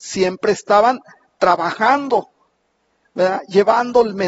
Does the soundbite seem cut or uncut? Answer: uncut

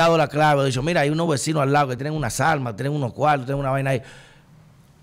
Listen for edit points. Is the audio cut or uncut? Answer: uncut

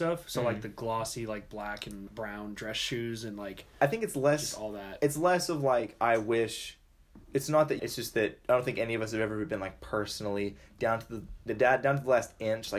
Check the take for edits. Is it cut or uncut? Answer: cut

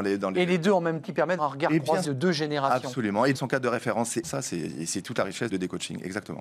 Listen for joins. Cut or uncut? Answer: cut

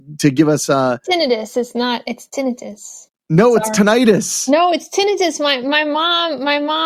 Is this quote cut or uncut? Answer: cut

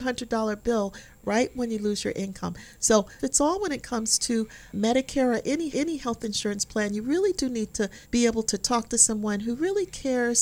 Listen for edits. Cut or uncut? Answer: cut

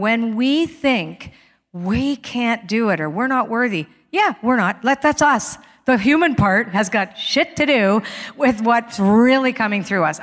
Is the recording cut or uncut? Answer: uncut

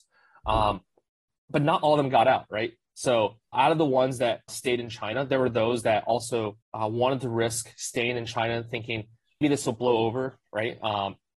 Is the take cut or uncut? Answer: cut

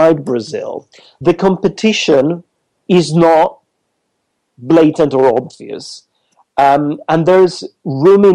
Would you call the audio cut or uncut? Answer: uncut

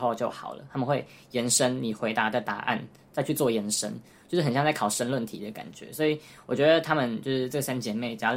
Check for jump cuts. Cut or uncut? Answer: uncut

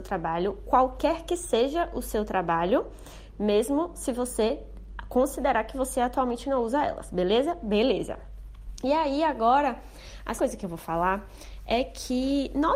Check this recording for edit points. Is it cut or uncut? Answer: cut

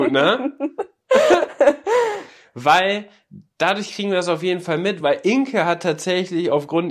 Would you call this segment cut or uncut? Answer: uncut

